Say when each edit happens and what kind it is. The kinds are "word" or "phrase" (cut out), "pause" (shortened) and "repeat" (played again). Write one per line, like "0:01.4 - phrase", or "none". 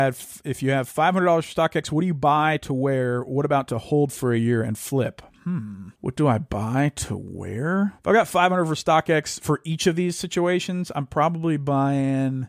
0:06.0 - pause
0:08.0 - pause

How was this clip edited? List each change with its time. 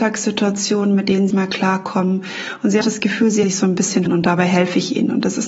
0:01.3 - phrase
0:02.8 - word
0:03.4 - word
0:04.1 - word

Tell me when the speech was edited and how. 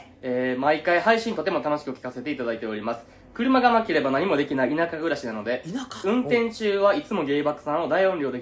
none

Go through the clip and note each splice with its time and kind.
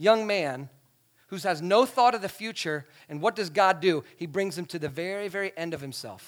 none

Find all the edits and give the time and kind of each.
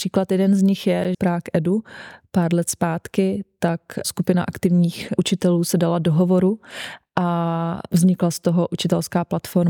0:01.1 - phrase

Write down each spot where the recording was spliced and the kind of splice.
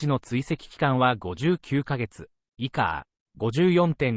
none

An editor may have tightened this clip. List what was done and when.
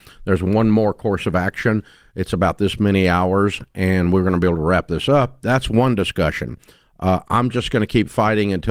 none

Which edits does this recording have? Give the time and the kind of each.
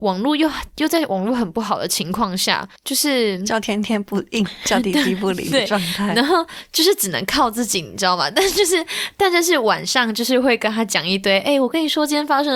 0:02.8 - pause

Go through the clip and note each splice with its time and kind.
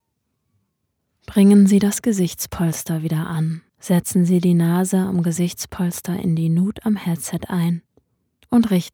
0:03.7 - pause

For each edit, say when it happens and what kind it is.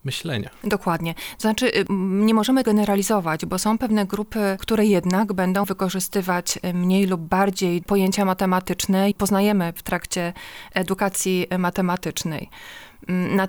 0:02.6 - word
0:04.6 - word
0:05.6 - word
0:07.8 - word
0:09.1 - word

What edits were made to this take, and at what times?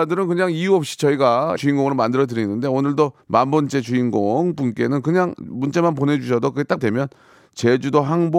0:01.6 - word
0:03.2 - pause
0:06.8 - phrase

